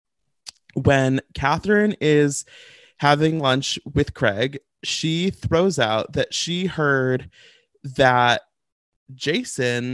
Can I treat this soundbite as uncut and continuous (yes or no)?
yes